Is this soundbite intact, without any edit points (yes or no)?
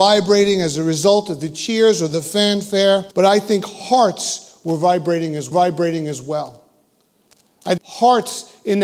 no